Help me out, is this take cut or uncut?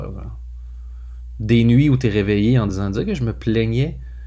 uncut